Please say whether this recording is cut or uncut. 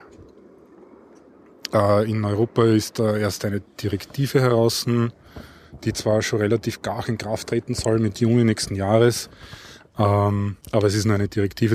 cut